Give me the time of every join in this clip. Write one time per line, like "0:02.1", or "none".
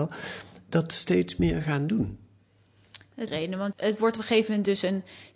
0:03.3
0:03.7

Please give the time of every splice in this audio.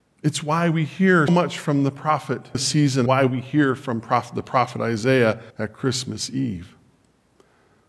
0:01.3
0:02.5
0:03.1
0:05.5

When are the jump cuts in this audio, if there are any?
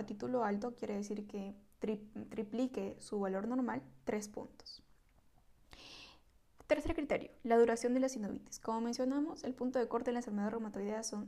none

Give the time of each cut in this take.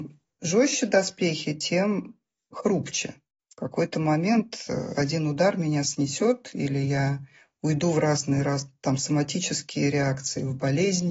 none

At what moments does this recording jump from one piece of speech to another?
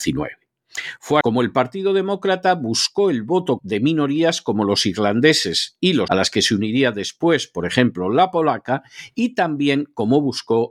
0:01.2
0:03.6
0:06.1

